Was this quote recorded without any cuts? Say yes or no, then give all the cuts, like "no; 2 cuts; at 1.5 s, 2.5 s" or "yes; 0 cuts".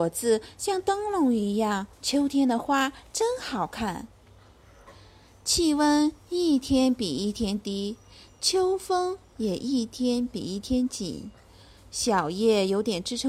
no; 1 cut; at 1.9 s